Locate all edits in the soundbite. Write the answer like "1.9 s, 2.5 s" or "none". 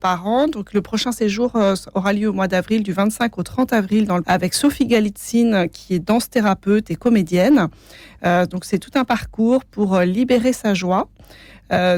4.2 s